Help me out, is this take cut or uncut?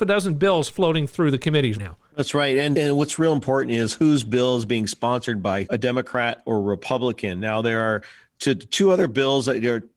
cut